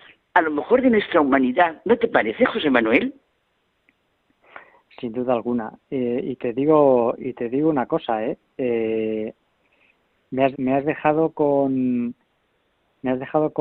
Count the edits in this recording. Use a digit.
1